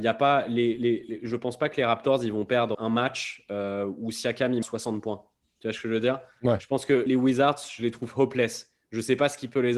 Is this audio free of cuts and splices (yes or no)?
no